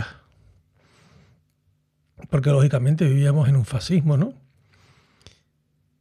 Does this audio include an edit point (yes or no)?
no